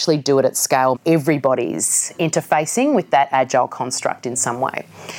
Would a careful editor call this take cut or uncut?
cut